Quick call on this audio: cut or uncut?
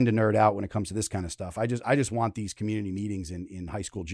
uncut